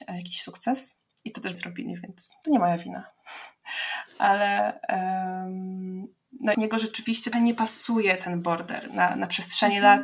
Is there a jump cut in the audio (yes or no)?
yes